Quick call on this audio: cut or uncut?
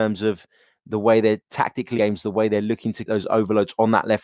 cut